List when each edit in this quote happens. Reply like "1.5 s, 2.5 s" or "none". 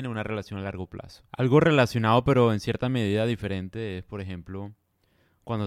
1.3 s